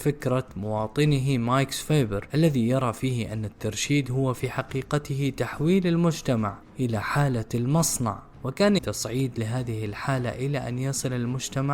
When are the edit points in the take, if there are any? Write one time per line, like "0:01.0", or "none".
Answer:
0:08.8